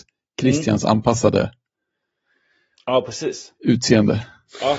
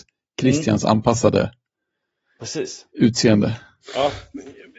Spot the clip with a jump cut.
second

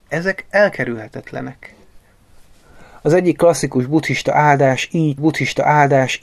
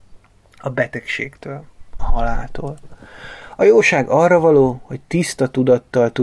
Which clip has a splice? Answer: first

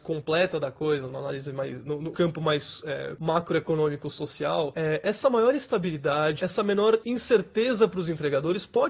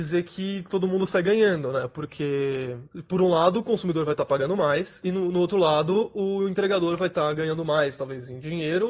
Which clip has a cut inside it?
first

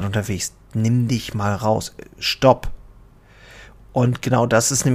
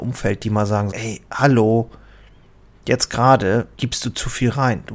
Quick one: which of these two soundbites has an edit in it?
second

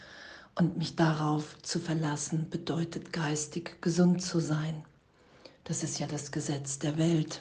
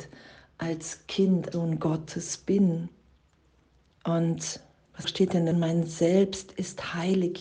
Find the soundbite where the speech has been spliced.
second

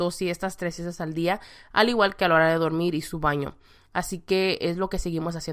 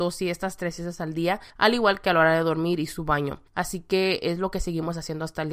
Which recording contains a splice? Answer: second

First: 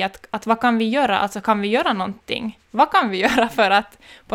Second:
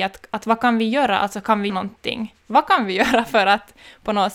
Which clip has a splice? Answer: second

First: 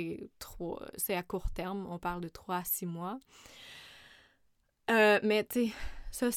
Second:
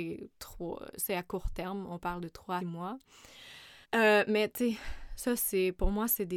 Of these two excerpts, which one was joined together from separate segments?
second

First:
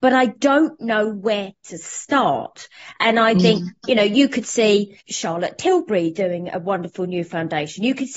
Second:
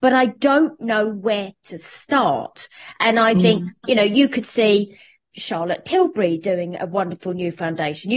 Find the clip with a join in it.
first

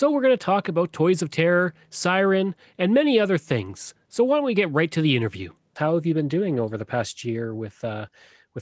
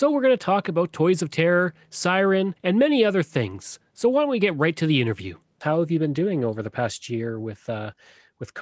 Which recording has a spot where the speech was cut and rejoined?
second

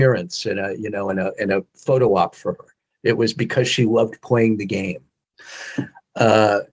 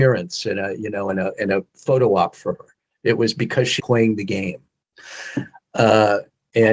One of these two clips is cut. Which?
second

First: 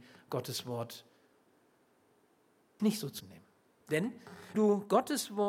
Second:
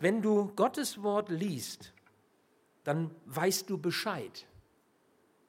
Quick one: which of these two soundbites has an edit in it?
first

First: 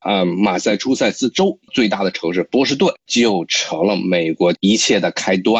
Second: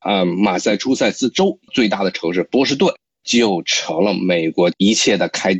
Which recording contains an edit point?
first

